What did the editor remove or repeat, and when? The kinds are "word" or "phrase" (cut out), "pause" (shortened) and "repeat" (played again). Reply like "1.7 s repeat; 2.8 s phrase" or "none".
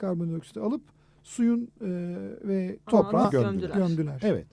2.9 s word; 3.2 s word